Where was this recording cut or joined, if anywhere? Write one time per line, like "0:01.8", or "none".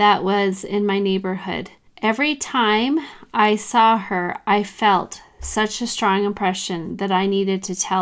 0:01.9